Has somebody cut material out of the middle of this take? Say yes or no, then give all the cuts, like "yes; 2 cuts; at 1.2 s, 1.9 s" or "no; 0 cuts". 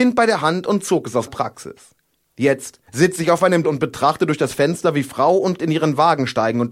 yes; 4 cuts; at 1.3 s, 2.9 s, 3.6 s, 5.6 s